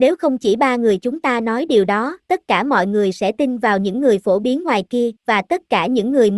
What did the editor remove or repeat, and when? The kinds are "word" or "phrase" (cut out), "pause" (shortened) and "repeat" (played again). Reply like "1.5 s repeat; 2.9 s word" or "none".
2.2 s pause; 5.2 s pause